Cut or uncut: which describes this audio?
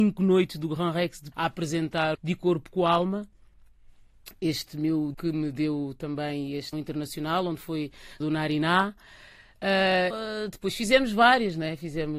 cut